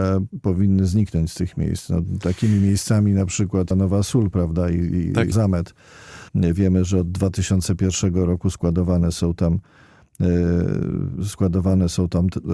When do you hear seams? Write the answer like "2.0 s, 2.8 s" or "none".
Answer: 3.7 s, 5.3 s, 6.3 s